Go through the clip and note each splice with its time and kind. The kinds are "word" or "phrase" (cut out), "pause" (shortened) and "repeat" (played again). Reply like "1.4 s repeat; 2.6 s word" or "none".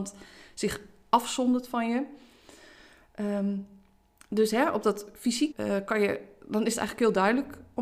5.5 s word